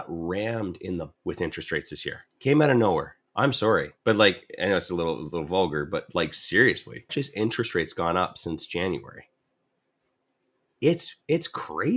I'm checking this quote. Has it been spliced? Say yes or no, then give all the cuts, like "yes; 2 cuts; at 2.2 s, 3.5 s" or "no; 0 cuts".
yes; 5 cuts; at 1.1 s, 2.3 s, 3.3 s, 4.0 s, 7.1 s